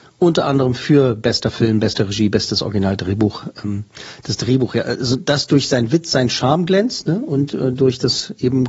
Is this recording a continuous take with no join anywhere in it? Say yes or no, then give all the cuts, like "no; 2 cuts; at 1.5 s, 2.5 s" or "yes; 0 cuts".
yes; 0 cuts